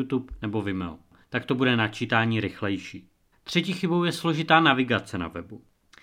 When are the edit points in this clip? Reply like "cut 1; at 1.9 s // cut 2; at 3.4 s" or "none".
cut 1; at 3.3 s

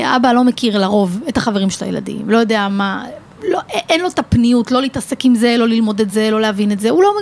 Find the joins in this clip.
none

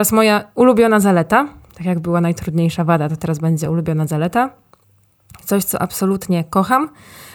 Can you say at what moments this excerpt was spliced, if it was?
none

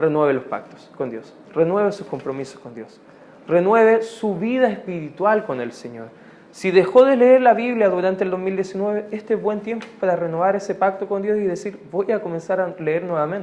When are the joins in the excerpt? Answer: cut 1; at 1.4 s

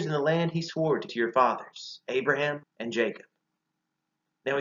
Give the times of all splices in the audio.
cut 1; at 1.1 s // cut 2; at 2.6 s

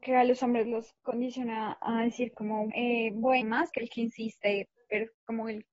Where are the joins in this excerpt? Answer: cut 1; at 2.7 s // cut 2; at 3.4 s // cut 3; at 3.7 s

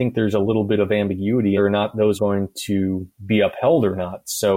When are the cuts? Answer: cut 1; at 1.6 s // cut 2; at 2.2 s // cut 3; at 3.1 s

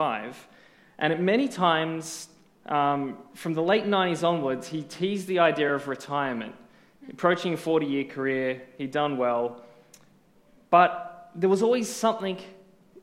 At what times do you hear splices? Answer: none

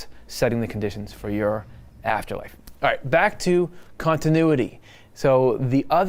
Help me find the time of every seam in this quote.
none

